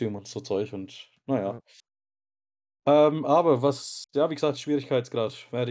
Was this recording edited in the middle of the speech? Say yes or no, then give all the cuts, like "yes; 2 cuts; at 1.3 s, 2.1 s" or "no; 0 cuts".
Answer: yes; 1 cut; at 4.1 s